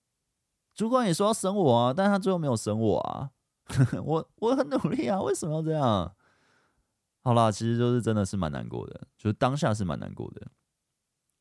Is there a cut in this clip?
no; 0 cuts

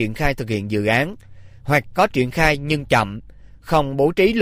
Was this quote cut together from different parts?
no; 0 cuts

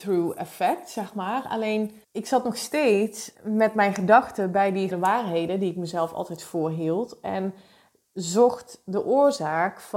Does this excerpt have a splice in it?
yes; 3 cuts; at 2.0 s, 3.3 s, 4.9 s

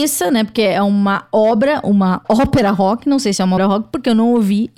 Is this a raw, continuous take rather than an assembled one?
no; 1 cut; at 3.6 s

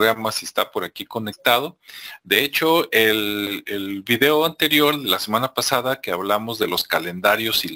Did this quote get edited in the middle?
no; 0 cuts

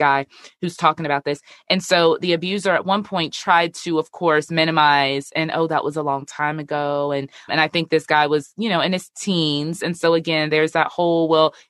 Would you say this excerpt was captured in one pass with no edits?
no; 1 cut; at 7.5 s

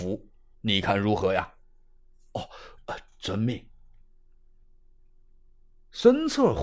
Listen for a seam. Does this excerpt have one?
no; 0 cuts

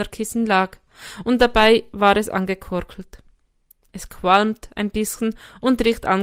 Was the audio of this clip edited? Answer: no; 0 cuts

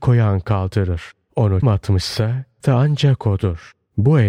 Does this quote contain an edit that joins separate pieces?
yes; 2 cuts; at 1.6 s, 2.6 s

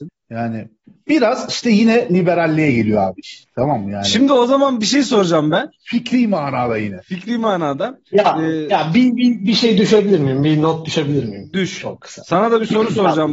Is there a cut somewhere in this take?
no; 0 cuts

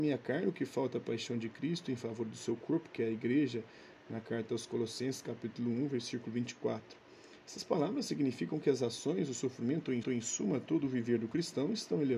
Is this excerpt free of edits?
no; 1 cut; at 10.0 s

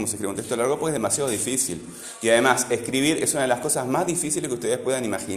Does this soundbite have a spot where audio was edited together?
no; 0 cuts

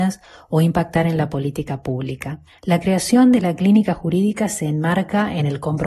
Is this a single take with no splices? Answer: yes; 0 cuts

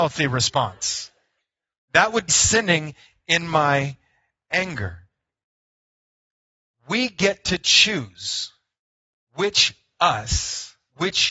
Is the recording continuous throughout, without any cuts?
no; 1 cut; at 2.3 s

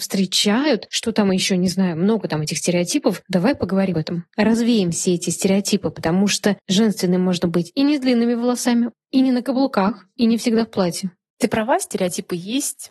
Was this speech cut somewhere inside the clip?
yes; 2 cuts; at 3.9 s, 6.6 s

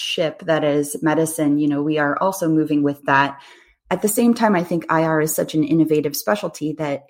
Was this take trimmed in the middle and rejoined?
no; 0 cuts

